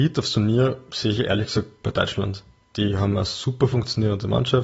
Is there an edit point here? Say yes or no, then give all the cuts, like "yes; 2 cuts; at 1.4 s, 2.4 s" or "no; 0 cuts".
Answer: no; 0 cuts